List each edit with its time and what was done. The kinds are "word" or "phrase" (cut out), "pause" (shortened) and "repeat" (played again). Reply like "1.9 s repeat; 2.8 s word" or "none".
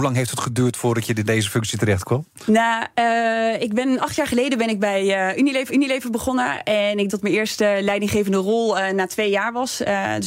5.7 s repeat; 7.1 s word